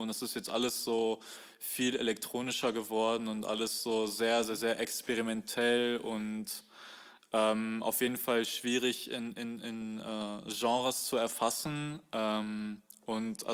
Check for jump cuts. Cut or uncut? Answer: uncut